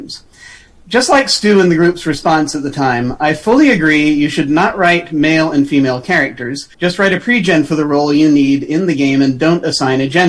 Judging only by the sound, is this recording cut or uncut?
cut